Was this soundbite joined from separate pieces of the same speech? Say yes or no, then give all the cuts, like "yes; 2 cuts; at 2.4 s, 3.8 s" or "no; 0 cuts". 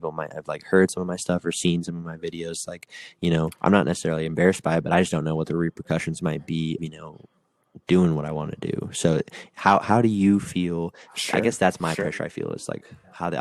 yes; 2 cuts; at 3.6 s, 6.8 s